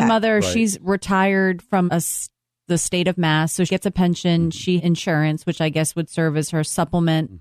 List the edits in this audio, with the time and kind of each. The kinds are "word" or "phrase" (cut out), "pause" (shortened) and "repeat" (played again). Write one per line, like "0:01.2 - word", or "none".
0:01.9 - word
0:03.7 - word
0:04.8 - word